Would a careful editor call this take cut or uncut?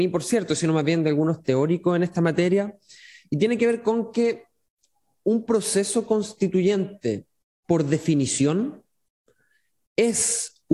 uncut